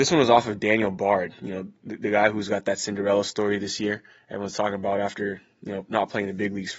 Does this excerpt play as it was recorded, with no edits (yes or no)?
yes